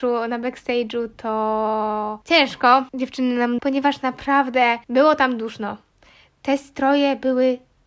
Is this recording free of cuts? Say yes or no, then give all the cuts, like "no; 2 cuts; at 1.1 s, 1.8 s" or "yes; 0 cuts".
no; 3 cuts; at 2.2 s, 3.6 s, 4.8 s